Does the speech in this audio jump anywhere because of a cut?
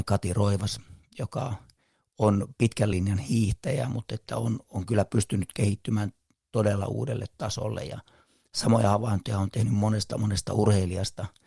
no; 0 cuts

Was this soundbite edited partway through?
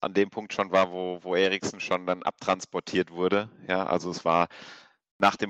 no; 0 cuts

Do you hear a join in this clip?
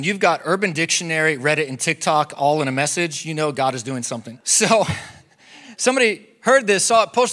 yes; 1 cut; at 4.4 s

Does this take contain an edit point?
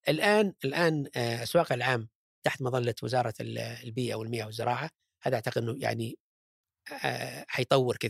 yes; 2 cuts; at 1.7 s, 2.4 s

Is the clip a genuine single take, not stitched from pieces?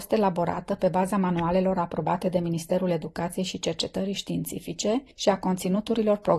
yes; 0 cuts

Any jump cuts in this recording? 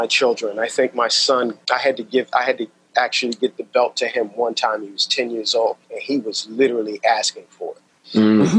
yes; 2 cuts; at 1.6 s, 5.8 s

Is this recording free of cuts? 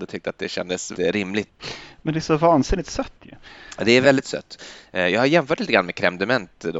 no; 2 cuts; at 0.9 s, 4.0 s

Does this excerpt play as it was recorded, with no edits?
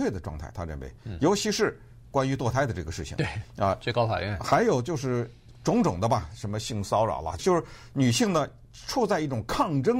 no; 1 cut; at 7.4 s

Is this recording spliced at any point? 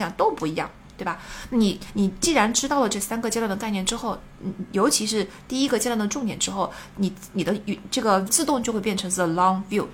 yes; 1 cut; at 8.3 s

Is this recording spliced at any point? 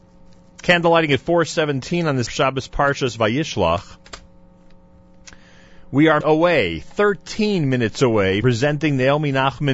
yes; 3 cuts; at 2.3 s, 6.2 s, 8.4 s

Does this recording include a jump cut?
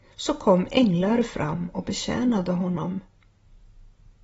no; 0 cuts

